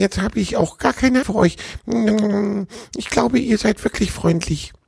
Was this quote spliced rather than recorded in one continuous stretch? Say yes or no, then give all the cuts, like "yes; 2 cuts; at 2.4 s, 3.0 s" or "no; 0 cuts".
yes; 1 cut; at 1.2 s